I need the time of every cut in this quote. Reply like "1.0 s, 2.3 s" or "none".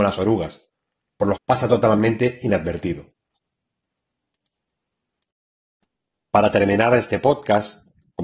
1.4 s